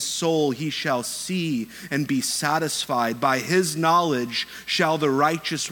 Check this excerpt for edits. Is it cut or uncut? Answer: uncut